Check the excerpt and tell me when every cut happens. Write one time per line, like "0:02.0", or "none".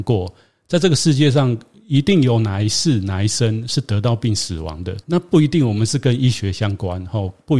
0:05.0